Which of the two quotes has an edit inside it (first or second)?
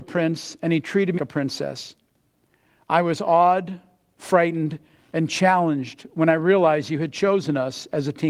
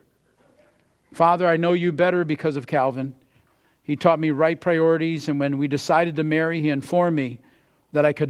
first